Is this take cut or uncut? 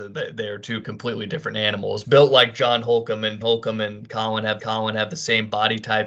cut